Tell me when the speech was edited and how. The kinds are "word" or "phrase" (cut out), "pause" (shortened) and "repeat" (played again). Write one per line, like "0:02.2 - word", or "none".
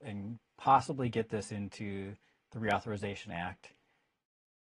none